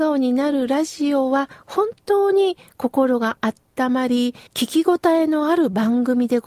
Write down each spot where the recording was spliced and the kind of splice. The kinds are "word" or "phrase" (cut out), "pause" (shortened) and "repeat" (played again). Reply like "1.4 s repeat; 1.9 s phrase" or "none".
4.5 s pause